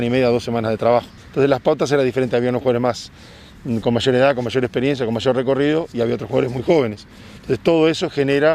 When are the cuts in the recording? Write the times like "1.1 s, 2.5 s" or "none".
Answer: 1.2 s